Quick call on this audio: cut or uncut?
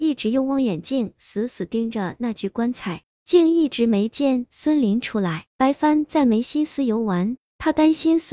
cut